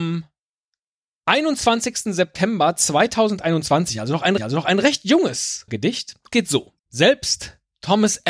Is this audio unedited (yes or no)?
no